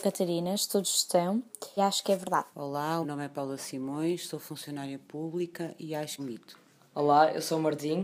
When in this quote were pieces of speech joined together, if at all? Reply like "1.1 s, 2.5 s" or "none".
1.8 s, 2.5 s, 3.0 s, 6.2 s